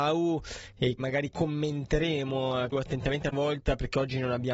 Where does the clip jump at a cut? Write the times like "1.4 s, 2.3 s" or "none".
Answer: 1.0 s, 2.7 s, 3.3 s